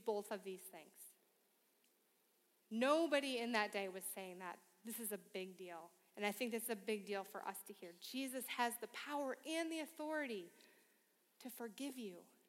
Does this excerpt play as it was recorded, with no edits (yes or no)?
yes